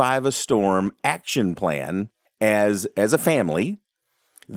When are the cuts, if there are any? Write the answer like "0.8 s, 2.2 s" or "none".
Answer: 2.3 s